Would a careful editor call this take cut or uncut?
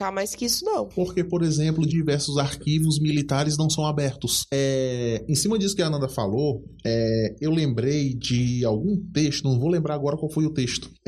cut